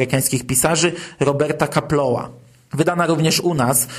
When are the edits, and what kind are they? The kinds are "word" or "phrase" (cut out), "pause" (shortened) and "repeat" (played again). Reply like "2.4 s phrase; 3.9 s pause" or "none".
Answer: none